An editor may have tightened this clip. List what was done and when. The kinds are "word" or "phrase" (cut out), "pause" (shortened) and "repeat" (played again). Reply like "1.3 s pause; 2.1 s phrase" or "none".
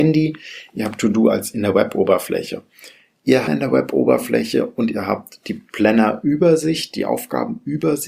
3.5 s phrase